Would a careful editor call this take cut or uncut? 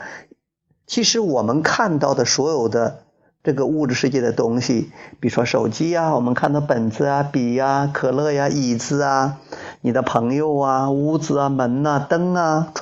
uncut